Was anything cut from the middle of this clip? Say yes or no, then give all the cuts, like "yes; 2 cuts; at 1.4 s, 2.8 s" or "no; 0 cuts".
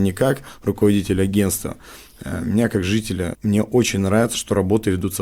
yes; 1 cut; at 3.3 s